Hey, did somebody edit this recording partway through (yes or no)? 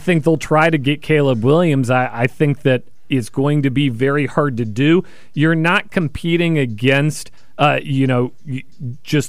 no